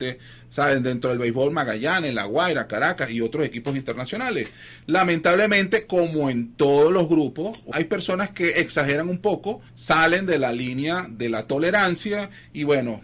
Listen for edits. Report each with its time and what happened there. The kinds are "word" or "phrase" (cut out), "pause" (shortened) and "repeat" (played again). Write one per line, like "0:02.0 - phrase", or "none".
0:07.7 - phrase
0:09.7 - pause